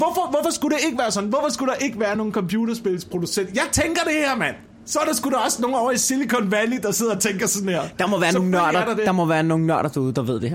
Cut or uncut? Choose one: uncut